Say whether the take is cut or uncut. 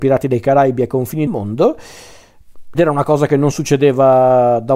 cut